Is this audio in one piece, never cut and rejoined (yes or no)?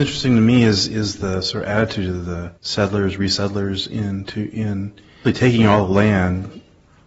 no